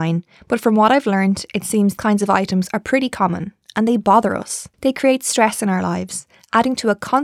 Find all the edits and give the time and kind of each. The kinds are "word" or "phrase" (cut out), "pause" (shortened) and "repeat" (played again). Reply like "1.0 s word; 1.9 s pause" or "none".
2.0 s word; 4.7 s pause